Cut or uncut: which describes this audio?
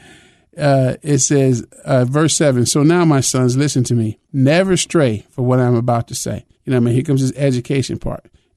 cut